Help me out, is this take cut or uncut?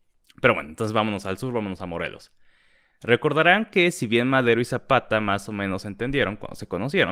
uncut